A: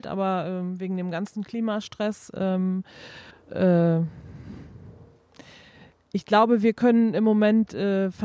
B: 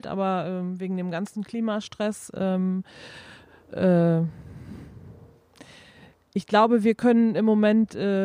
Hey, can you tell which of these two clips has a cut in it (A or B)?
A